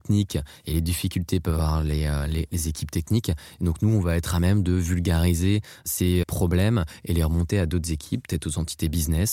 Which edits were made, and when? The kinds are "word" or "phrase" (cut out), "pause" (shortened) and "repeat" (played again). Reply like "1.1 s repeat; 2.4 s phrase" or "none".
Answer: 6.2 s word